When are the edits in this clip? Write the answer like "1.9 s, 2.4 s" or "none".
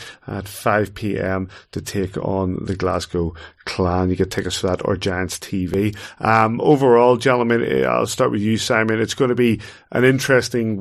none